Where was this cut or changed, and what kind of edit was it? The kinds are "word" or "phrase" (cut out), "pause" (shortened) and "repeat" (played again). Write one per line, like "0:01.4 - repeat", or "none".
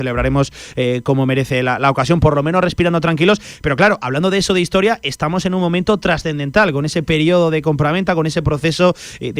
none